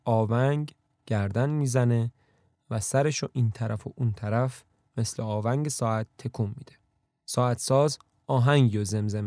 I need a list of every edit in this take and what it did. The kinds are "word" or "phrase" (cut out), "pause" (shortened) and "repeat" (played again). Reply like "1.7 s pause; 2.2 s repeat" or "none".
none

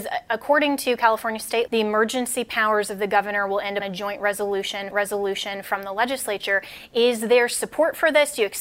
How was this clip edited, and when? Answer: 1.7 s word; 3.8 s word; 4.9 s repeat

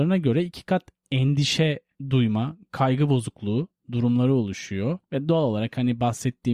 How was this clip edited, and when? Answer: 5.0 s pause

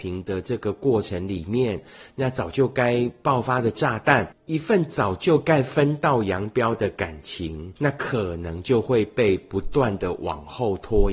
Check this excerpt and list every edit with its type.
none

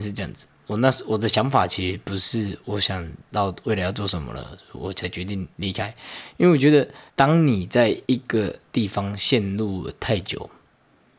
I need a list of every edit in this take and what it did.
5.5 s pause; 7.1 s pause; 8.0 s pause

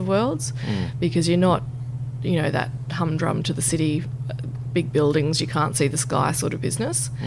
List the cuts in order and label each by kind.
none

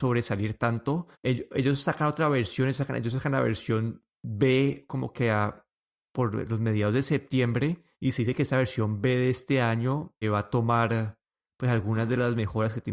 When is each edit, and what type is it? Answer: 1.1 s pause; 7.9 s pause; 10.2 s word

